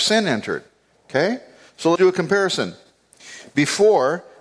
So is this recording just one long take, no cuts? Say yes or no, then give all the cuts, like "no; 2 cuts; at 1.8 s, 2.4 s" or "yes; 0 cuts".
no; 1 cut; at 2.0 s